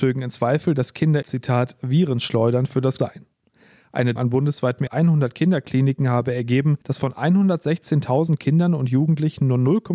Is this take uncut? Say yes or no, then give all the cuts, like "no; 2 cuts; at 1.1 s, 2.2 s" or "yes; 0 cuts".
no; 5 cuts; at 1.2 s, 3.0 s, 4.2 s, 4.9 s, 6.8 s